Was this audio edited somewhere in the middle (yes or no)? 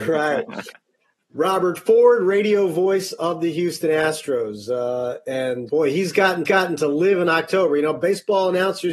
yes